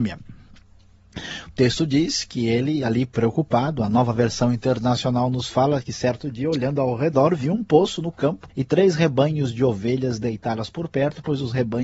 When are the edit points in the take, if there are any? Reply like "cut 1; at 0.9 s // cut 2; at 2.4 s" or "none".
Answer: cut 1; at 8.5 s